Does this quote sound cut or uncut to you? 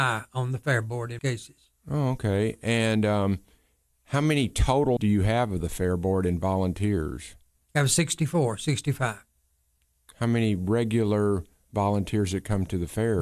cut